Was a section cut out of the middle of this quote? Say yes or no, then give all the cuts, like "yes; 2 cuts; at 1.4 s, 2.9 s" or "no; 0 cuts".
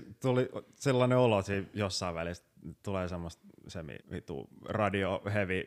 yes; 1 cut; at 4.0 s